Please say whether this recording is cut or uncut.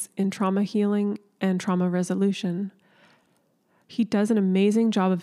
uncut